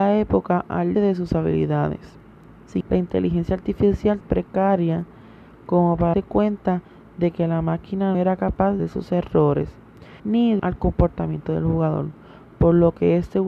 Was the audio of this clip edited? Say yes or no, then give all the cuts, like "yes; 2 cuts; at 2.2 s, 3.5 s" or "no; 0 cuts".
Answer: yes; 8 cuts; at 0.9 s, 2.8 s, 4.2 s, 6.1 s, 8.1 s, 8.8 s, 10.2 s, 10.6 s